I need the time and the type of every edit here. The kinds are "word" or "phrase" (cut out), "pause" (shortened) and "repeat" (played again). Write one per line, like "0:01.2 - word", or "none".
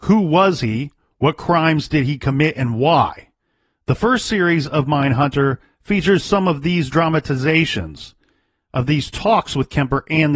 none